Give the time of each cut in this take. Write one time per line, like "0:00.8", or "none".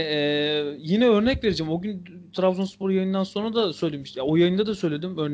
none